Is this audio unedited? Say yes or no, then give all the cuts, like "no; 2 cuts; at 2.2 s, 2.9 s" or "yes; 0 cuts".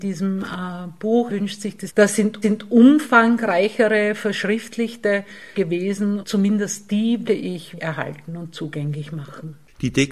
no; 7 cuts; at 1.3 s, 1.9 s, 2.4 s, 5.5 s, 6.2 s, 7.3 s, 7.8 s